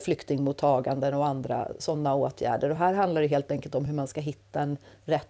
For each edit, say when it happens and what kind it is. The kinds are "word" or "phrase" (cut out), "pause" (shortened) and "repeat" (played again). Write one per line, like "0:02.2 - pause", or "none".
none